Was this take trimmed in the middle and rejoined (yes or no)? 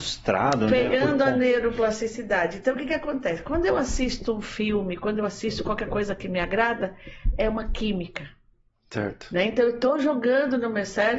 no